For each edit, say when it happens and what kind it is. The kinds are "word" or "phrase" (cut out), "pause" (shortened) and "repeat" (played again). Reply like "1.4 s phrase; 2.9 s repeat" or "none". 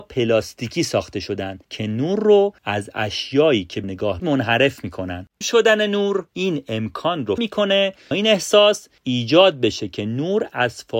1.6 s pause; 2.6 s pause; 3.8 s word; 4.2 s word; 5.4 s word; 6.3 s pause; 7.4 s word; 8.1 s word; 9.0 s pause